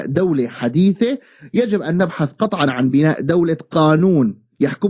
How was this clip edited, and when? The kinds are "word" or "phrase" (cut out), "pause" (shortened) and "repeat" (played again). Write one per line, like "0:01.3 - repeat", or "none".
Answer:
none